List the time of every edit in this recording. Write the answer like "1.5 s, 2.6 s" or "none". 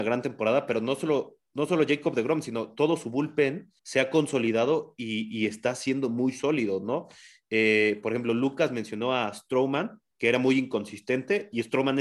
3.8 s, 10.1 s